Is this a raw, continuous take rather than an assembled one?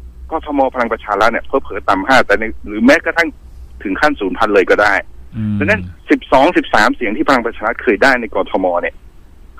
no; 1 cut; at 6.0 s

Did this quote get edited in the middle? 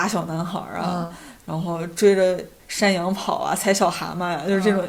no; 0 cuts

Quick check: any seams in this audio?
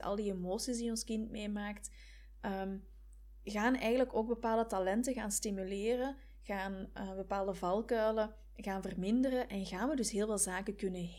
no; 0 cuts

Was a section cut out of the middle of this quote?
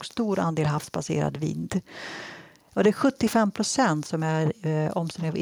no; 0 cuts

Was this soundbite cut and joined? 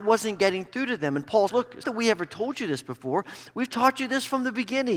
yes; 2 cuts; at 1.5 s, 1.8 s

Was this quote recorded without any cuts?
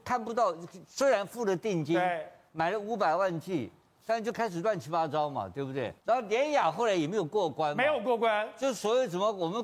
no; 1 cut; at 6.0 s

